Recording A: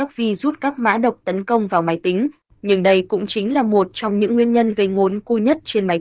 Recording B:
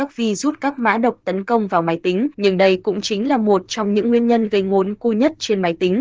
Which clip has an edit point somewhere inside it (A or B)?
B